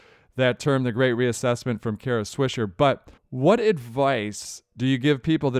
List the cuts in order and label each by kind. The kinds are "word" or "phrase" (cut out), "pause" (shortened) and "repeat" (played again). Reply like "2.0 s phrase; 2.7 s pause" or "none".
3.2 s pause